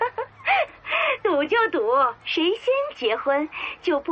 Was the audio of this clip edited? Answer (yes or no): yes